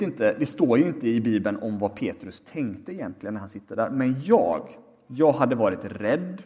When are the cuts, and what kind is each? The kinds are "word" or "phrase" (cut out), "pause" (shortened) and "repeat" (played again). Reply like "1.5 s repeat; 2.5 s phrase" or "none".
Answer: none